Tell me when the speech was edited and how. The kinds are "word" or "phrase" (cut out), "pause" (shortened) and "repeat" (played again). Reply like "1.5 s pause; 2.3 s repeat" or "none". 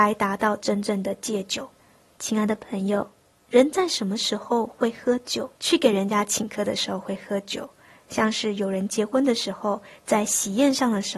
1.8 s pause; 3.3 s pause; 5.5 s pause